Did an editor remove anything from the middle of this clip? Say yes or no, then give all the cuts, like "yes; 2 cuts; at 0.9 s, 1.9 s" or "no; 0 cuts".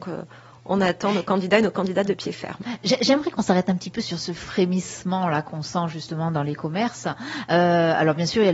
no; 0 cuts